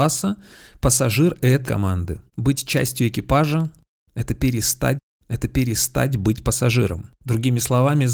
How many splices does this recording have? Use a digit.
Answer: 3